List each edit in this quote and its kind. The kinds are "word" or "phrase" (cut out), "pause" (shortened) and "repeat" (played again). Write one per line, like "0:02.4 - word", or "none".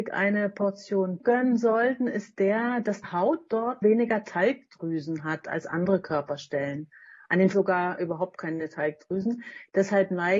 0:01.2 - word
0:03.0 - word
0:03.8 - word
0:07.5 - word